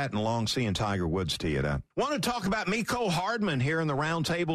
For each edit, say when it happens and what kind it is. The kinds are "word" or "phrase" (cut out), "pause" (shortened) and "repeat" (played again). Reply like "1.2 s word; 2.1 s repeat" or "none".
1.9 s pause